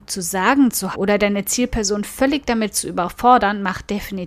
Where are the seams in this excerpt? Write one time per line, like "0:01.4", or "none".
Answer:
0:00.9